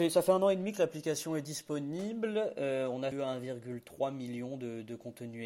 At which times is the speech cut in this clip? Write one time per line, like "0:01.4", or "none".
0:03.1